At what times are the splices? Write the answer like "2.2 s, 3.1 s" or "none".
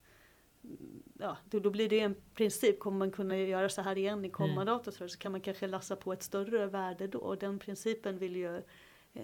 none